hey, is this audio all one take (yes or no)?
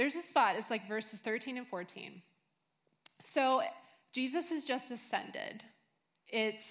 yes